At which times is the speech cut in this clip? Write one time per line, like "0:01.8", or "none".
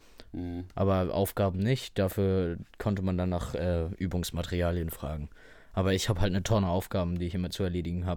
none